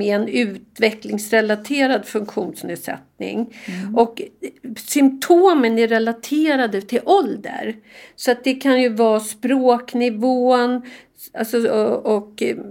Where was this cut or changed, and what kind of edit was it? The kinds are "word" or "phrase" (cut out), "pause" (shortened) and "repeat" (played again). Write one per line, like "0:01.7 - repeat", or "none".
none

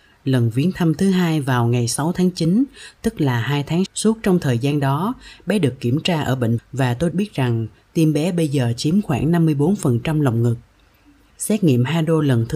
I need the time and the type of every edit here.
0:03.9 - word
0:06.6 - word
0:07.1 - word

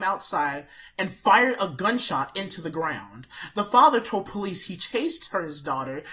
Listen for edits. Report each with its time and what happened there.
none

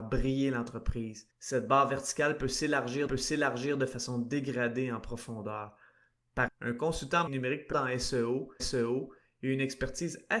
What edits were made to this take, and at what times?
0:01.3 - pause
0:03.1 - repeat
0:06.5 - word
0:07.3 - word
0:07.7 - phrase
0:08.6 - repeat

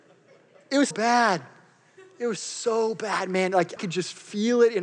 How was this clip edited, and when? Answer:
0:00.9 - word
0:03.8 - word

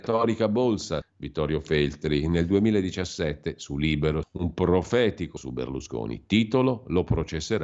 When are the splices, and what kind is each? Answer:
0:01.0 - word
0:04.2 - word
0:05.4 - word

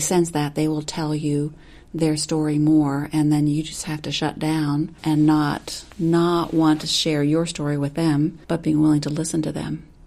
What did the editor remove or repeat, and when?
0:05.0 - pause
0:05.9 - pause
0:08.4 - pause

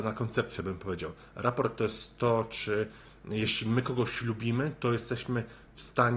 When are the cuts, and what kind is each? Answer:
none

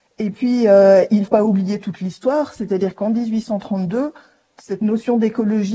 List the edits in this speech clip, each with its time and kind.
0:01.3 - word

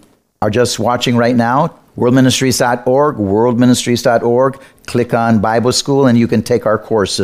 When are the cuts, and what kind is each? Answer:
0:01.9 - pause

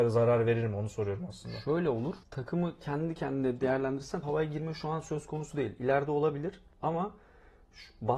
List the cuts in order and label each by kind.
0:02.2 - pause
0:04.2 - word

